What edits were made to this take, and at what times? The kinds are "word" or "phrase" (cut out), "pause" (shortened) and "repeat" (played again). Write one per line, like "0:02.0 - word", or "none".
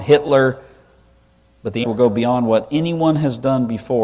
0:01.8 - word